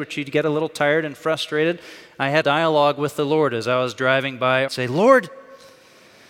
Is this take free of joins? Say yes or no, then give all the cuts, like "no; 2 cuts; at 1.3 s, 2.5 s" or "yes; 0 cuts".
no; 2 cuts; at 2.4 s, 4.7 s